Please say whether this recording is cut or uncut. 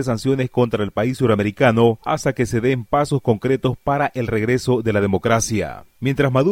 uncut